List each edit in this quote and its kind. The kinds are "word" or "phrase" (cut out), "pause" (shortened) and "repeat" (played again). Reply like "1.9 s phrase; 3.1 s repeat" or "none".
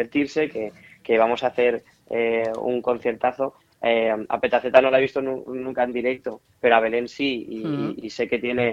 none